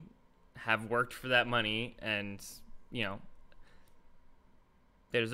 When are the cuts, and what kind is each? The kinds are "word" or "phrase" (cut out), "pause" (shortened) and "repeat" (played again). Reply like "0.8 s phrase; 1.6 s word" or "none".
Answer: none